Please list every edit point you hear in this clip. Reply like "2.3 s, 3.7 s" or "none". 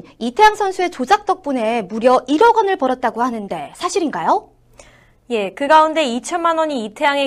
none